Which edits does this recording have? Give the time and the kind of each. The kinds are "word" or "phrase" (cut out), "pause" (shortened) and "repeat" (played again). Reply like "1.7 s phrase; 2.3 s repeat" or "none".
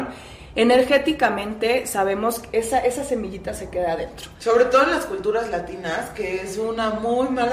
none